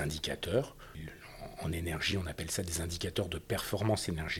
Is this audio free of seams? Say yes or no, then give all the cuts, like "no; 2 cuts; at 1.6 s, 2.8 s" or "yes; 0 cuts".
yes; 0 cuts